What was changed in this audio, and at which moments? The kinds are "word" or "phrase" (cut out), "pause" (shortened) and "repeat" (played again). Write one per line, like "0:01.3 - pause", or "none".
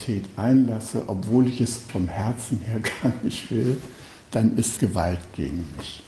0:01.9 - word
0:04.8 - word